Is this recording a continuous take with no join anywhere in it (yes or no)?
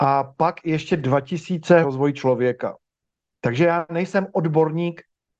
no